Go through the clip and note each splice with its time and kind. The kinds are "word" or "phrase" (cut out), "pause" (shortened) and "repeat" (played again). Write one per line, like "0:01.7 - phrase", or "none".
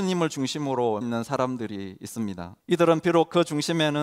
0:01.0 - word
0:02.6 - pause

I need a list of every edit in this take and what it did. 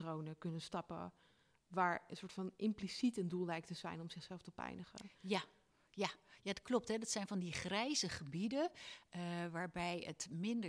none

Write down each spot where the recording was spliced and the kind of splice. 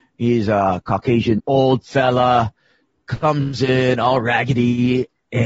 0:01.4 - word

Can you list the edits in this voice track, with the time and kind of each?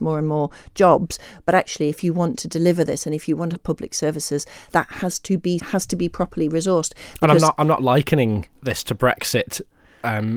0:03.6 - phrase
0:04.7 - word
0:05.6 - phrase
0:08.5 - pause

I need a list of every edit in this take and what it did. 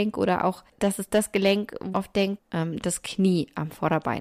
0:01.9 - word
0:02.4 - phrase

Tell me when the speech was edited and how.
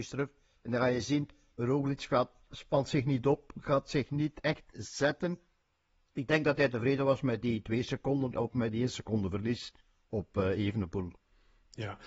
none

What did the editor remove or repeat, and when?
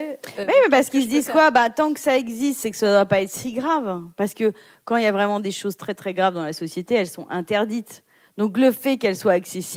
none

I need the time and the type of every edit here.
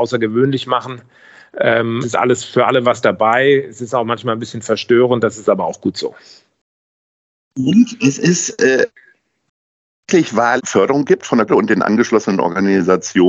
0:02.0 - word
0:10.6 - word
0:11.5 - word

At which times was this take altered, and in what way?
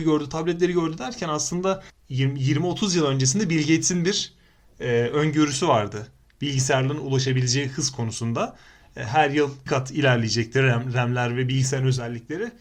0:09.7 - word

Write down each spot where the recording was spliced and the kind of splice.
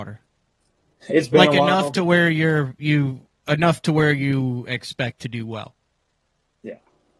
0:03.4 - pause

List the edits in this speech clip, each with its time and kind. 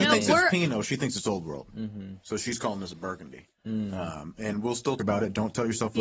0:03.6 - pause
0:05.0 - word

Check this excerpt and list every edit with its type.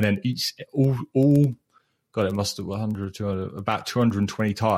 none

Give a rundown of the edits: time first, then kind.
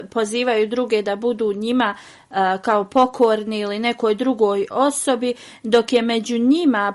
none

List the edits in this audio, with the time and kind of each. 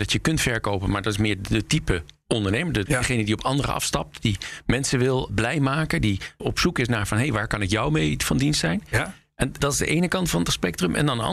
0:02.9 - word
0:05.3 - word
0:06.4 - word
0:09.6 - word

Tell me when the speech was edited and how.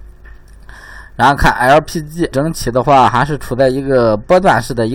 0:02.3 - word

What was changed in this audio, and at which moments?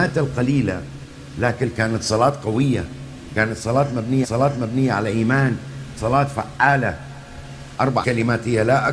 0:04.2 - repeat
0:06.0 - word
0:08.0 - word

